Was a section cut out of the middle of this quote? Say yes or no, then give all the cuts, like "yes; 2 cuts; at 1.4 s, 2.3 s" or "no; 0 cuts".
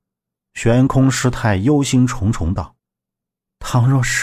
yes; 1 cut; at 2.8 s